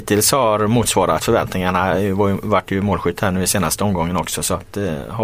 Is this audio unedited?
yes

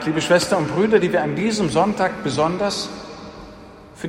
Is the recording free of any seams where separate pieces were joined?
yes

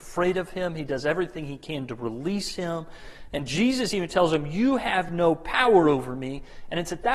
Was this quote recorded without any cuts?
yes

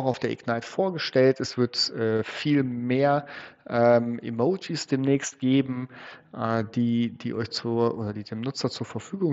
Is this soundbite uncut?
yes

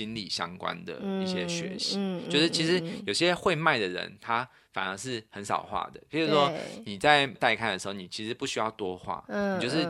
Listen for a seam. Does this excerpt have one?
no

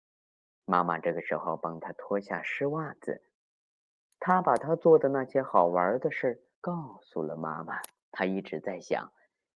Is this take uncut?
no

